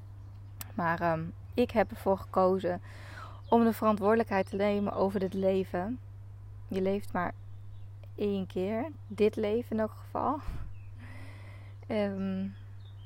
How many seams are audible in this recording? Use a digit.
0